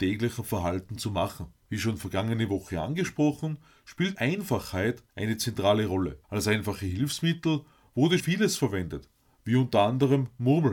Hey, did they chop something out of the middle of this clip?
yes; 5 cuts; at 1.6 s, 4.1 s, 5.1 s, 6.2 s, 8.2 s

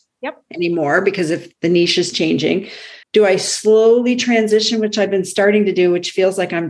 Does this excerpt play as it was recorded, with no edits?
no; 1 cut; at 3.0 s

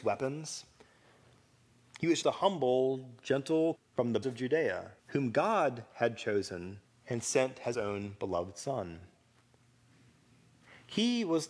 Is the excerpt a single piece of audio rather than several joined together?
no; 6 cuts; at 2.2 s, 3.7 s, 4.2 s, 5.0 s, 6.8 s, 7.7 s

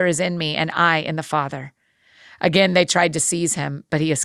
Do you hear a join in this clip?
no; 0 cuts

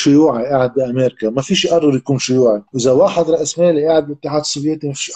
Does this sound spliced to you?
yes; 1 cut; at 2.7 s

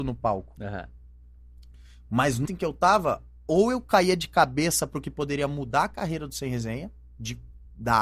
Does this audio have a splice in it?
yes; 1 cut; at 2.5 s

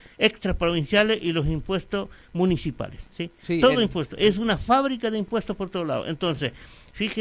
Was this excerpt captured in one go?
no; 1 cut; at 3.1 s

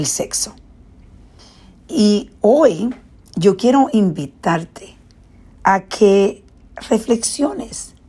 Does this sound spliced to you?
no; 0 cuts

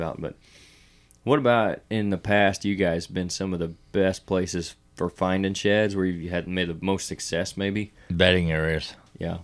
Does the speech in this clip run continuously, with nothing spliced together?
yes; 0 cuts

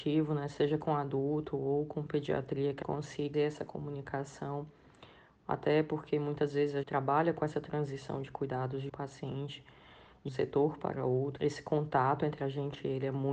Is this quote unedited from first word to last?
no; 6 cuts; at 2.8 s, 3.3 s, 6.8 s, 8.9 s, 10.3 s, 11.4 s

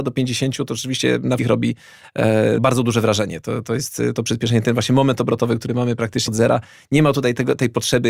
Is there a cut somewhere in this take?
yes; 4 cuts; at 1.4 s, 2.6 s, 4.1 s, 6.3 s

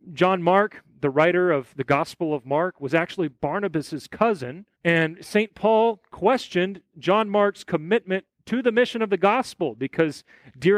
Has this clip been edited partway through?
yes; 1 cut; at 4.7 s

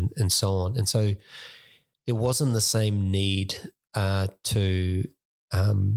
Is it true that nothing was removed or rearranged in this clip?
yes; 0 cuts

